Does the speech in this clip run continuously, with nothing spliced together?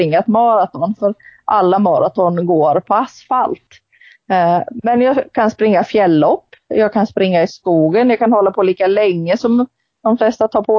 yes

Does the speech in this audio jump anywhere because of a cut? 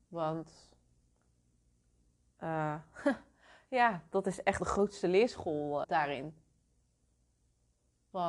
yes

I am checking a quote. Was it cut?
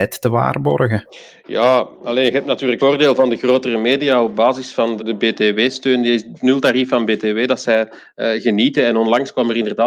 yes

